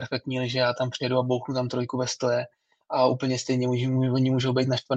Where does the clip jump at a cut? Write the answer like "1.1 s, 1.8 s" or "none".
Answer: none